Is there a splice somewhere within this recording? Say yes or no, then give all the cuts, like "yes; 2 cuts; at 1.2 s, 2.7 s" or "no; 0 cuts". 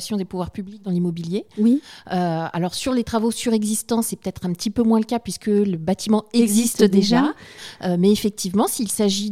no; 0 cuts